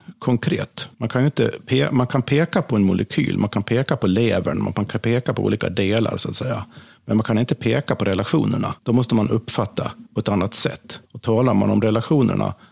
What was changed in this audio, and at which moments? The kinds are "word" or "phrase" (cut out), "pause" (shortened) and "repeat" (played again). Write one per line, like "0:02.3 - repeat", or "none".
0:00.9 - pause
0:08.8 - pause
0:10.1 - pause
0:11.1 - pause